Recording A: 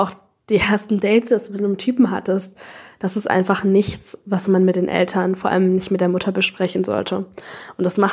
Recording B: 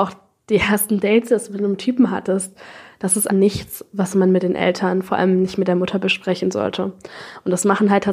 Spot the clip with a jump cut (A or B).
B